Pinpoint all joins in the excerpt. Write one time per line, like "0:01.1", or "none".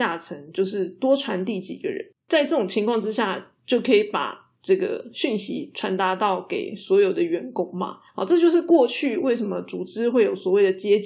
0:02.2
0:08.1